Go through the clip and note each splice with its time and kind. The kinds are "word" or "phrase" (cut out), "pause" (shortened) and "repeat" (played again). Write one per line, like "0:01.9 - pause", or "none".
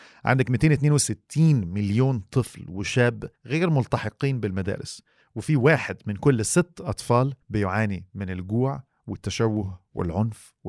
0:03.4 - pause
0:07.4 - pause